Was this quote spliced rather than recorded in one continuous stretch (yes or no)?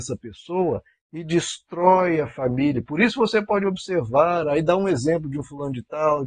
no